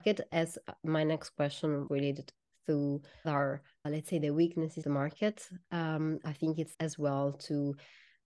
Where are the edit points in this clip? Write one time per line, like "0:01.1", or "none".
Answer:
0:01.9
0:03.2
0:03.8
0:04.8
0:06.7